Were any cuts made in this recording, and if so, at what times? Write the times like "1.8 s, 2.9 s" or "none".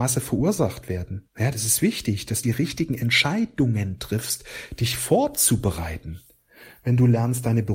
1.3 s, 2.4 s